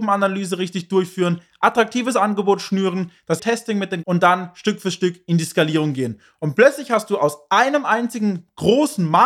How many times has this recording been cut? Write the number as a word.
two